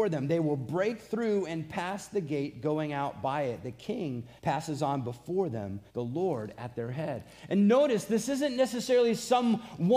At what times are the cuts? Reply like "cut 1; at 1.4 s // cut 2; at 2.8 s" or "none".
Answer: cut 1; at 4.4 s // cut 2; at 5.9 s